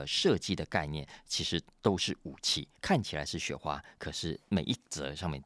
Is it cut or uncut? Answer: cut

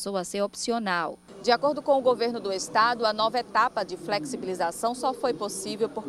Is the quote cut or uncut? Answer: uncut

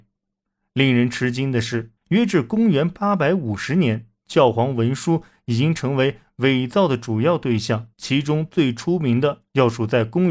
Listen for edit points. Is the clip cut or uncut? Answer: cut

